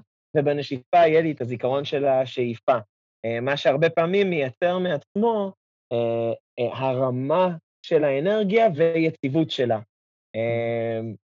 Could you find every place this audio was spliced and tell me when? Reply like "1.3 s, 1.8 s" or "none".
none